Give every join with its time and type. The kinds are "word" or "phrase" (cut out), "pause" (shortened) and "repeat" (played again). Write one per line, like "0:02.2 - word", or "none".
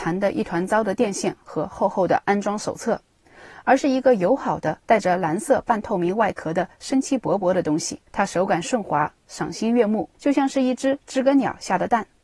0:04.8 - pause
0:08.1 - pause
0:10.1 - pause